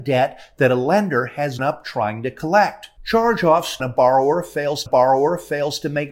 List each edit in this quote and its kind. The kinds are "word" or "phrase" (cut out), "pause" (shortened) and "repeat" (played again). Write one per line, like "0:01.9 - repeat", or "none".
0:01.6 - word
0:03.8 - phrase
0:04.9 - repeat